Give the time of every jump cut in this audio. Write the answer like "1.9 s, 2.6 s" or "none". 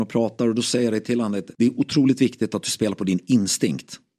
1.5 s